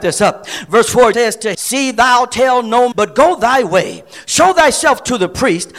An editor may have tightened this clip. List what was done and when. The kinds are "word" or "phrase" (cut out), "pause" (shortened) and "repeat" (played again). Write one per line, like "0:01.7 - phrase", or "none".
0:01.1 - word
0:01.5 - word
0:02.9 - word